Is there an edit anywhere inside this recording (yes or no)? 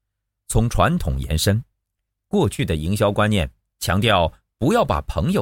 no